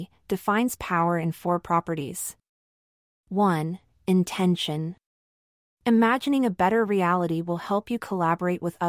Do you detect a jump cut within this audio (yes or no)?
no